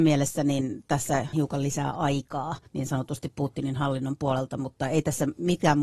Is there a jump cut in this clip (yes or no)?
yes